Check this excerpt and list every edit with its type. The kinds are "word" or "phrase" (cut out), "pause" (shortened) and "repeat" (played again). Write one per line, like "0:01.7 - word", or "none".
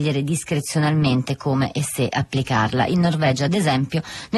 none